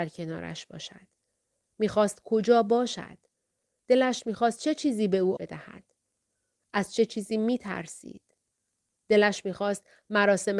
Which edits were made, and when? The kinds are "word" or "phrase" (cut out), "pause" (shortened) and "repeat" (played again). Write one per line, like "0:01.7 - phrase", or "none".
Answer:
0:05.4 - word

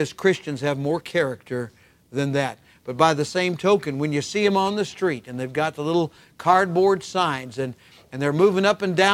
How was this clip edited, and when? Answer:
none

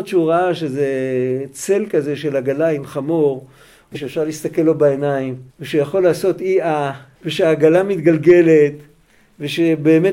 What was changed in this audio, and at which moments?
0:03.9 - phrase
0:05.5 - pause
0:07.1 - pause

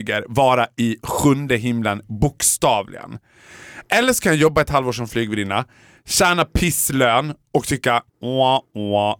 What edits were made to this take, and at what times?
0:08.1 - word

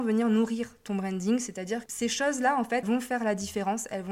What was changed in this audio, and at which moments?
0:01.9 - word
0:02.8 - word

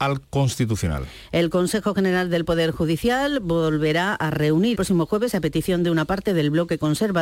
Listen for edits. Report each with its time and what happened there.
0:04.7 - word

